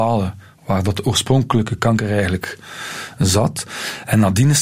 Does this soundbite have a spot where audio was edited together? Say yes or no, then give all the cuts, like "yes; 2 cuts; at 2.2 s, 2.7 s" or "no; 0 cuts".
no; 0 cuts